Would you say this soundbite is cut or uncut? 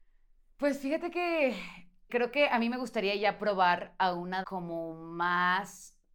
cut